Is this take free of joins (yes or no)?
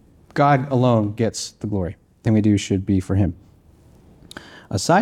no